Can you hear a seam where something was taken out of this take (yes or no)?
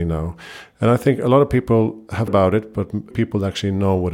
yes